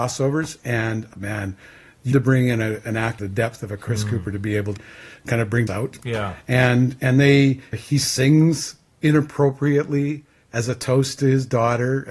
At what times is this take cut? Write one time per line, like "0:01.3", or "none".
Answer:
0:01.1
0:02.1
0:03.2
0:04.8
0:05.7
0:07.7